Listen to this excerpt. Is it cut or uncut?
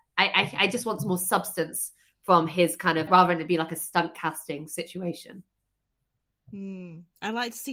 cut